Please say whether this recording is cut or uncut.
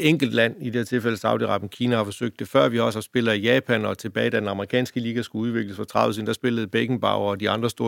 uncut